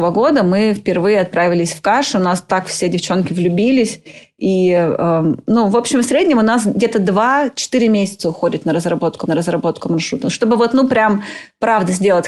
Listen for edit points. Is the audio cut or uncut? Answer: cut